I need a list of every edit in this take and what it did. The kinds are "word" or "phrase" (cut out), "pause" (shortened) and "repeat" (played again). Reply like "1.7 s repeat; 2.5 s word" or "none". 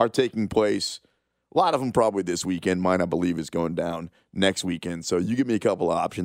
none